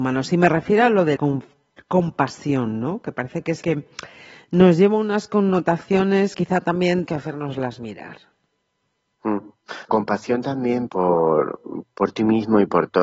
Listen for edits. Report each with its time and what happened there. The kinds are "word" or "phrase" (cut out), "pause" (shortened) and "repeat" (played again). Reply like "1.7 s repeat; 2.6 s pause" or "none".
1.2 s word; 3.6 s word; 6.3 s word; 7.0 s word; 9.9 s word; 10.9 s word